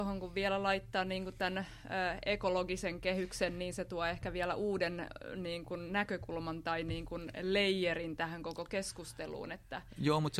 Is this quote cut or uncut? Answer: uncut